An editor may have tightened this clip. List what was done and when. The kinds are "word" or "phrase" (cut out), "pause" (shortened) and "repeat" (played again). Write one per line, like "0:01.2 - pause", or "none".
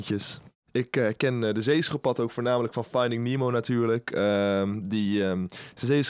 none